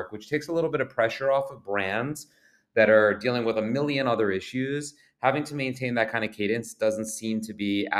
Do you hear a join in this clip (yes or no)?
no